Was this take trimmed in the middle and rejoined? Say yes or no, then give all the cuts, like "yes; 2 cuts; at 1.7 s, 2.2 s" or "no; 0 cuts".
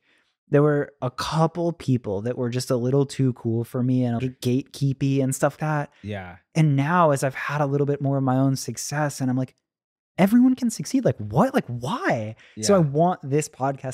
yes; 2 cuts; at 4.2 s, 5.6 s